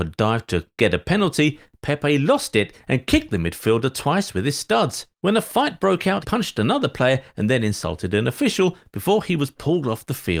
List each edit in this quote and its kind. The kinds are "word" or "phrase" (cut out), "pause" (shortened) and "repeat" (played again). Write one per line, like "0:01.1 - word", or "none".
0:05.1 - pause
0:06.2 - word